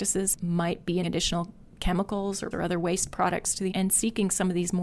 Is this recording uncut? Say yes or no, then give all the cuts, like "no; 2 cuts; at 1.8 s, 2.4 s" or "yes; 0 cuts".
no; 3 cuts; at 1.0 s, 2.5 s, 3.7 s